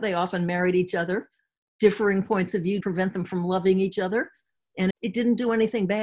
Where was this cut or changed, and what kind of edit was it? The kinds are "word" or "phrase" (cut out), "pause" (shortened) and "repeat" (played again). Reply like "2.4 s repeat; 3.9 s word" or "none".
2.8 s word; 4.9 s word